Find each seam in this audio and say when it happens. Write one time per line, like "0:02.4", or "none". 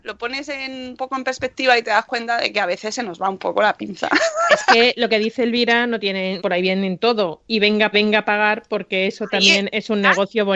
0:06.4
0:07.9